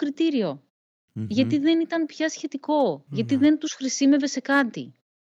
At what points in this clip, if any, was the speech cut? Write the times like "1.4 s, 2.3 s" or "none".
none